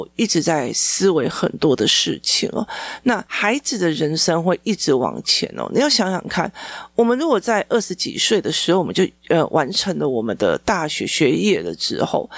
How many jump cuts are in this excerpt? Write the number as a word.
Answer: one